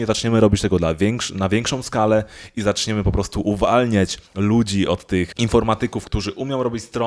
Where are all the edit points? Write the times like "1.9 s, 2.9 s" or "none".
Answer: 4.3 s